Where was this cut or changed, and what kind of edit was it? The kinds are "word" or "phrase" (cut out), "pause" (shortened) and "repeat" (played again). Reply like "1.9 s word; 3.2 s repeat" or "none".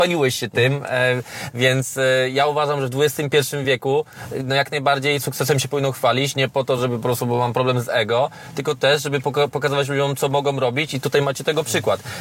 none